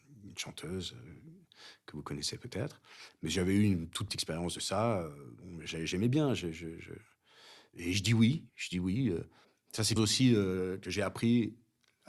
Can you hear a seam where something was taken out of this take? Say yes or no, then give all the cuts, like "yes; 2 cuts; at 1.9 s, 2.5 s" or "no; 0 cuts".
yes; 4 cuts; at 4.1 s, 8.5 s, 9.4 s, 10.0 s